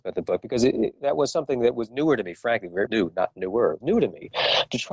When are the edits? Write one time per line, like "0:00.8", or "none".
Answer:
0:02.9
0:03.8